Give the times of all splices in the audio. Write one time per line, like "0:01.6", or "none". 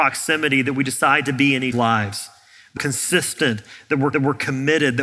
0:01.7
0:02.8
0:04.1